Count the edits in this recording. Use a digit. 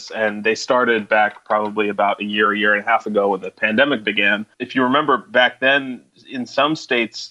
1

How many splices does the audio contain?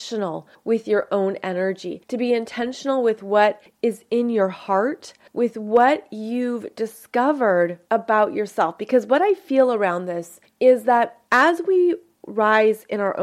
2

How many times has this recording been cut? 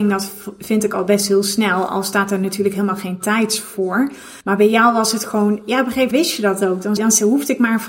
3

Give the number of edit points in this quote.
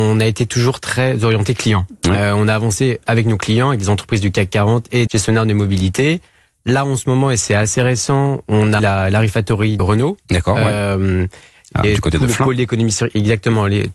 4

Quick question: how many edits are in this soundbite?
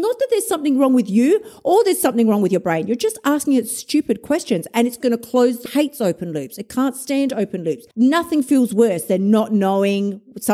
3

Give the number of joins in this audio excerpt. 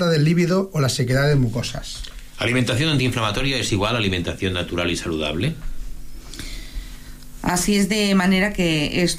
0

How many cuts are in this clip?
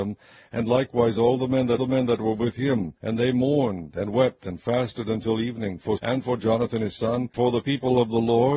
4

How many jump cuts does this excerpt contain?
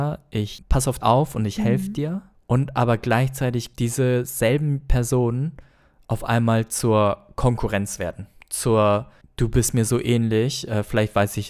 3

